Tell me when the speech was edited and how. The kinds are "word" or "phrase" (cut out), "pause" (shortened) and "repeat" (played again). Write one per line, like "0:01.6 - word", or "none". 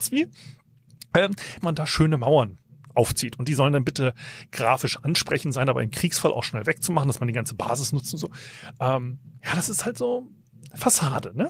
0:01.6 - word